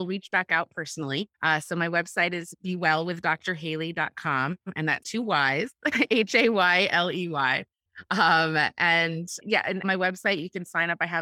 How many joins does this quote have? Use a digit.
4